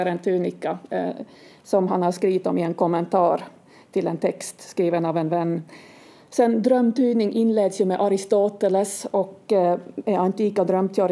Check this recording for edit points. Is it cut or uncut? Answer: uncut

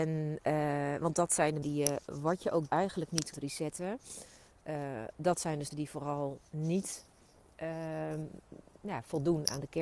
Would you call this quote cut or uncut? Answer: cut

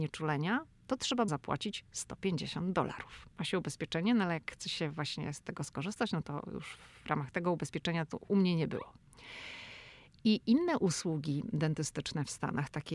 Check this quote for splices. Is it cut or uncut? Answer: cut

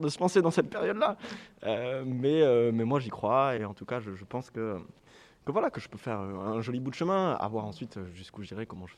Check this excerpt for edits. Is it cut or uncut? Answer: cut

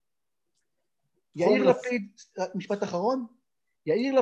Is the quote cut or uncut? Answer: uncut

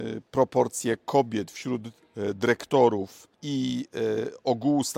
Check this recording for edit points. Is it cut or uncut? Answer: cut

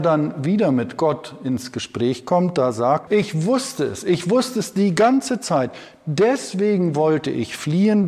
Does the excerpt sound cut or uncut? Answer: cut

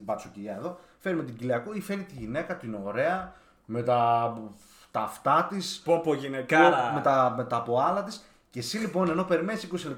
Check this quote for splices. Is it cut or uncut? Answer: uncut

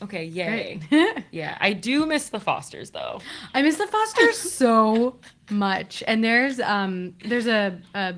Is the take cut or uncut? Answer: uncut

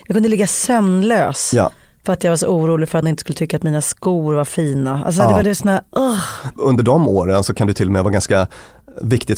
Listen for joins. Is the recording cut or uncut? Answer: cut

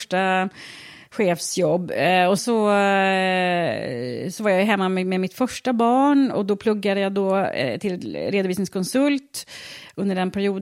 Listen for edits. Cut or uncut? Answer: cut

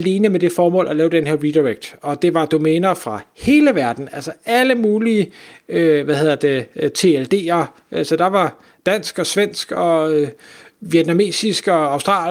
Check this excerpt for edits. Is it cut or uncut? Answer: uncut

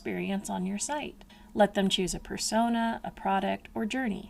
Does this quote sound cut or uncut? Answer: uncut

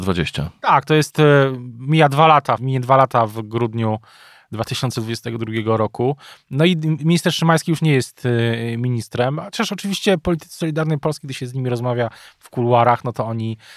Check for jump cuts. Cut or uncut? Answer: cut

